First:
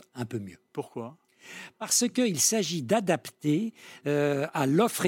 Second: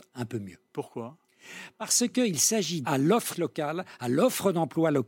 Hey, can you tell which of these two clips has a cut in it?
second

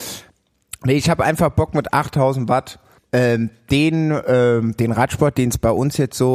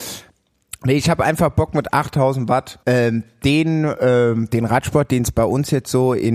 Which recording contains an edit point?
second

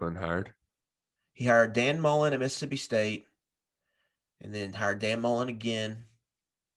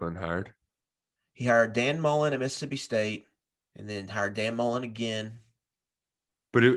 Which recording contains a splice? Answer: second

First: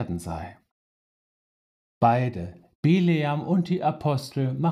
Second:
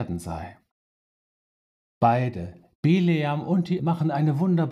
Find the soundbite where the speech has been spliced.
second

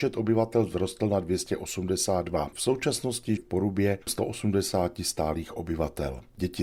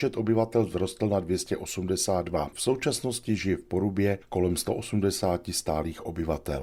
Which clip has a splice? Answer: first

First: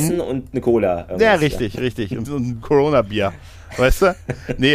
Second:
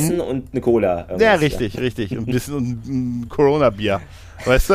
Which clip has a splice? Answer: first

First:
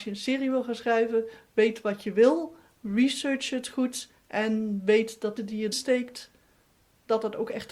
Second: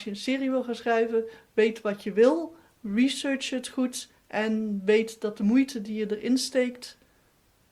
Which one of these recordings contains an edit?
first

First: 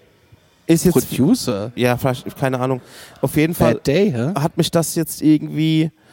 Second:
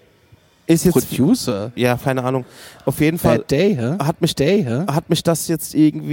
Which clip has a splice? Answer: second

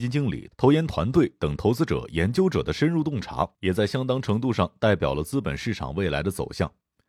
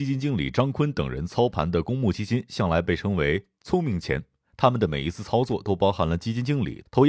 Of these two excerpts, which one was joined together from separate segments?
first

